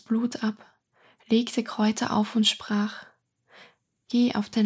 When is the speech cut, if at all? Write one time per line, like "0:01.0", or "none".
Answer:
none